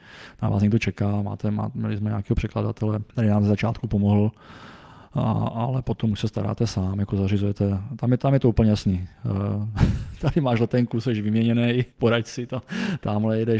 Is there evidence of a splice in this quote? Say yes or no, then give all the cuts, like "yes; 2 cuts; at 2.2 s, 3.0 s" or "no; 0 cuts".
yes; 2 cuts; at 3.1 s, 11.9 s